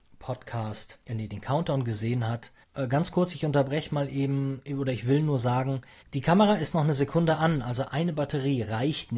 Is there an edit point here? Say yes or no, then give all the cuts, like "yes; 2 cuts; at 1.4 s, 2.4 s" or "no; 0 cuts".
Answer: yes; 3 cuts; at 1.0 s, 2.6 s, 6.0 s